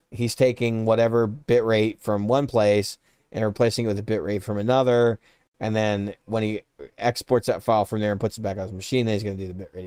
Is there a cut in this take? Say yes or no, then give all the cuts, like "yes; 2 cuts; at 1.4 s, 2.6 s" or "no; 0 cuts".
no; 0 cuts